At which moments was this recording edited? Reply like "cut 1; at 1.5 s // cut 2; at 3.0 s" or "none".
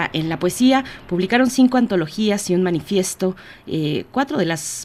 none